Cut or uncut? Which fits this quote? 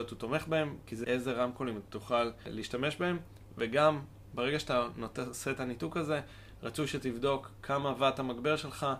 cut